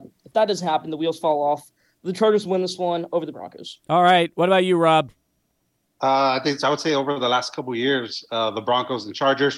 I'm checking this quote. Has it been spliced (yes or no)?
no